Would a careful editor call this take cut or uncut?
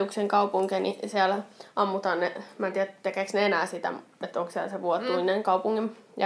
uncut